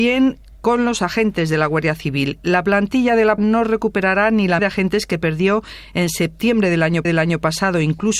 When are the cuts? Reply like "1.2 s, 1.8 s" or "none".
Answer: 3.4 s, 4.6 s, 7.0 s

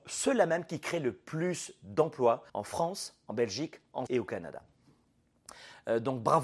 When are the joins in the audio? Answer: 2.5 s, 4.1 s

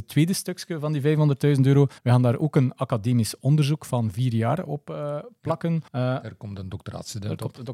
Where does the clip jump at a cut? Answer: 2.0 s, 5.9 s

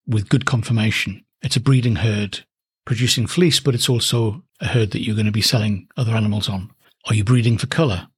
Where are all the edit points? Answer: 1.3 s, 2.6 s, 4.5 s, 6.8 s

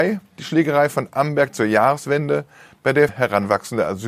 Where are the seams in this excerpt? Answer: 3.1 s

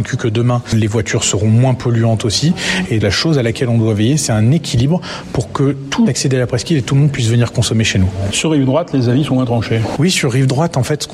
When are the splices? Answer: 3.0 s, 6.1 s

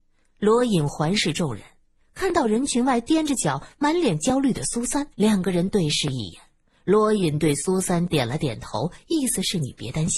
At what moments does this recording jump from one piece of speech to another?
5.1 s

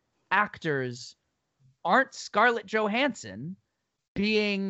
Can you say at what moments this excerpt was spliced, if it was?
1.8 s

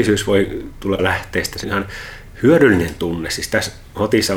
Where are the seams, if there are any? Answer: 1.0 s, 1.6 s

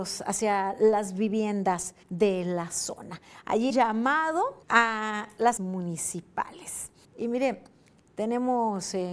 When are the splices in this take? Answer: 2.0 s, 3.7 s, 4.6 s, 5.6 s, 7.0 s

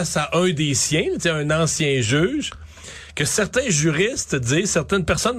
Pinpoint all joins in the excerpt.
none

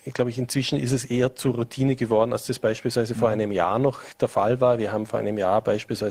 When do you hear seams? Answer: none

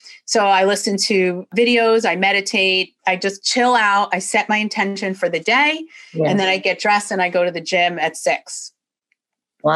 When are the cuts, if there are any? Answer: 3.0 s

